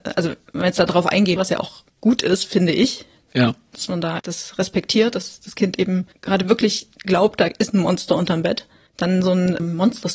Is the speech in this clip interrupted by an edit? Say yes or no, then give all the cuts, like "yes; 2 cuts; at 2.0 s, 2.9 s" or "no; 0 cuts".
yes; 2 cuts; at 1.4 s, 4.2 s